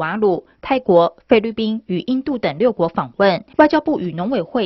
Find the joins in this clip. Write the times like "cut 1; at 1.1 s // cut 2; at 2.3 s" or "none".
cut 1; at 3.5 s